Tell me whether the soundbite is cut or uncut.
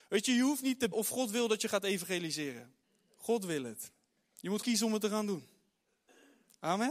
cut